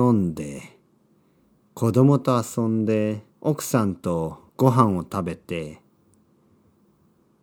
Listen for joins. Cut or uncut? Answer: cut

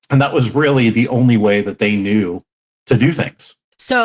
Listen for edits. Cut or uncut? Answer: uncut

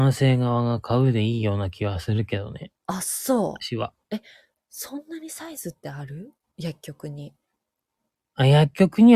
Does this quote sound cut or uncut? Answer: cut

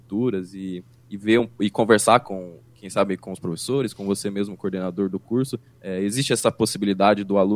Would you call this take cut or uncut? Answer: uncut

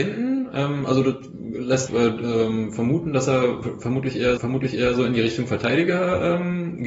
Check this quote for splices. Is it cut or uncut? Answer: cut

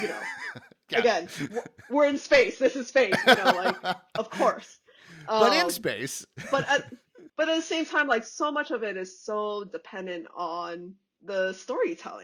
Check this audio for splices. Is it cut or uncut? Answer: uncut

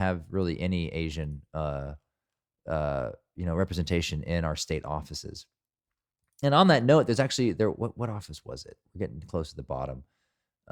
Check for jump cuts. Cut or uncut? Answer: uncut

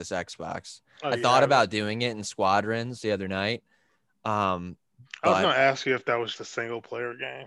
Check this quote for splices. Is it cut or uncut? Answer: cut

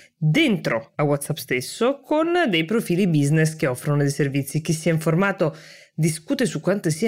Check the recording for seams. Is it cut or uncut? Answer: uncut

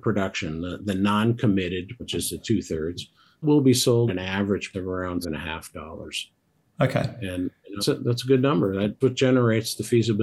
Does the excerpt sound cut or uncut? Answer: cut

